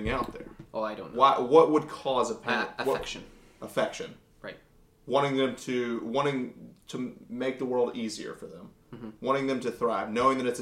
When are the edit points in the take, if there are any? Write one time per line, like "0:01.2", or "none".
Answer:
none